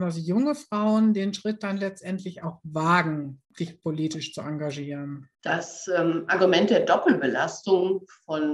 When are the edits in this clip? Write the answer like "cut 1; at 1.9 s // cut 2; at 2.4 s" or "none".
cut 1; at 3.4 s // cut 2; at 5.3 s